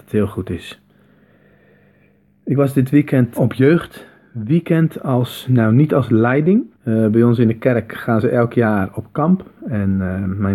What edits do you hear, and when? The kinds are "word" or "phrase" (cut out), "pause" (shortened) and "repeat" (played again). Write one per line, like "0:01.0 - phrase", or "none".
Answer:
0:03.4 - word
0:06.7 - pause